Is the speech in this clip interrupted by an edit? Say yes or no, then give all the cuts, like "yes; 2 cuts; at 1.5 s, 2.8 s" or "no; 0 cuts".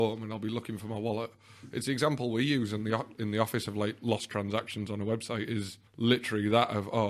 yes; 1 cut; at 5.9 s